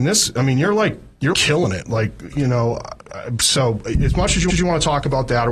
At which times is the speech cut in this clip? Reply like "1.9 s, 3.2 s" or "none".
1.3 s, 4.5 s